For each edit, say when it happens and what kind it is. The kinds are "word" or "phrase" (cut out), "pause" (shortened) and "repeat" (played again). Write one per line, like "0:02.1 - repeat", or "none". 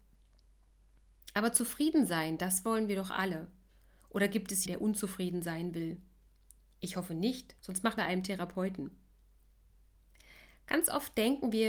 0:04.7 - word
0:07.6 - pause
0:08.0 - phrase